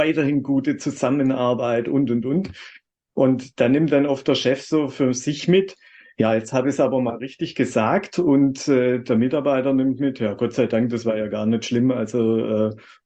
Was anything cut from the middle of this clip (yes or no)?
no